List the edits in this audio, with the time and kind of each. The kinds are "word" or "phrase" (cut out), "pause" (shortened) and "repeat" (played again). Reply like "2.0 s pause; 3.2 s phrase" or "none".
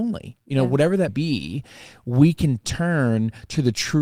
1.1 s word; 2.6 s word

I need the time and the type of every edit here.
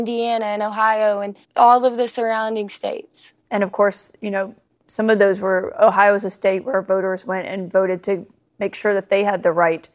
1.4 s pause; 3.4 s pause

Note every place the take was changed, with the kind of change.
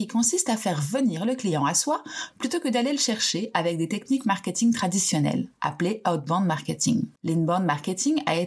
5.5 s pause; 7.2 s pause

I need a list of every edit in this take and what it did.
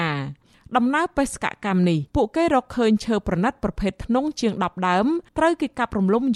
2.1 s pause; 5.3 s pause

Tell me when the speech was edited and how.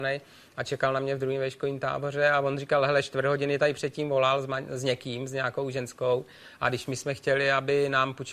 none

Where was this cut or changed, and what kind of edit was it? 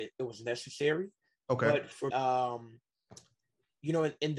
2.1 s word

